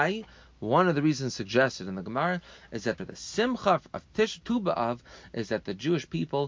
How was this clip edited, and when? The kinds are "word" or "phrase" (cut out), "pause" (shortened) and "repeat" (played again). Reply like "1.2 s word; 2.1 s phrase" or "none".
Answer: 3.0 s phrase; 4.4 s word